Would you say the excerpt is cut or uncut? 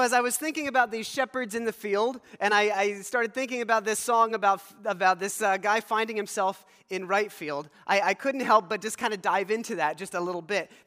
uncut